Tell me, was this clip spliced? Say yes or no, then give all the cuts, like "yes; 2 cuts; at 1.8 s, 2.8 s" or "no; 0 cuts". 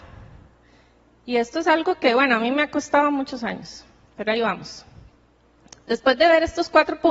no; 0 cuts